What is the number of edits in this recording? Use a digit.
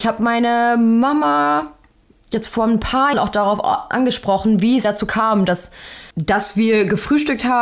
3